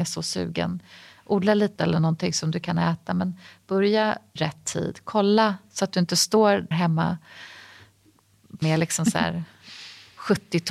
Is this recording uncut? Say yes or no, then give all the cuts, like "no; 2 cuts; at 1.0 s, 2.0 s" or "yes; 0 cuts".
no; 4 cuts; at 1.8 s, 4.4 s, 6.7 s, 8.6 s